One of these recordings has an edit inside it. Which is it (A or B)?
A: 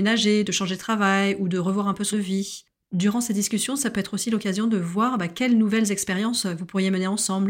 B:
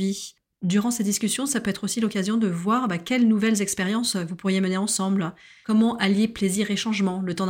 A